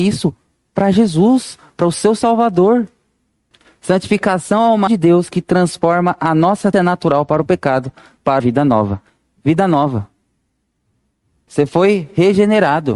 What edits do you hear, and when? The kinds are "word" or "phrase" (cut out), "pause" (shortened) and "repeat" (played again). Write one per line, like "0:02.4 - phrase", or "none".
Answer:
0:03.5 - pause
0:04.9 - word
0:06.7 - word
0:08.4 - word